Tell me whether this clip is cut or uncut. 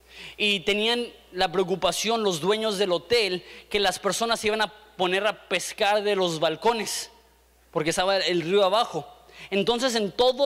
uncut